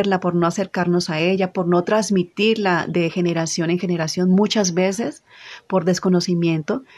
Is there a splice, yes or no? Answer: no